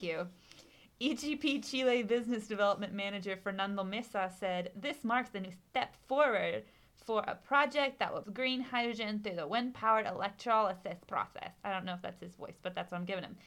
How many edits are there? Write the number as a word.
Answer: one